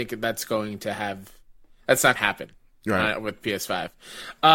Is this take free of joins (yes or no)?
no